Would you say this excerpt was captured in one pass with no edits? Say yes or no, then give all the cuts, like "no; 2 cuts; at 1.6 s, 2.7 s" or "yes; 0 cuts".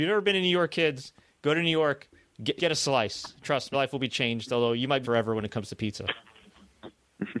no; 3 cuts; at 2.6 s, 3.7 s, 5.0 s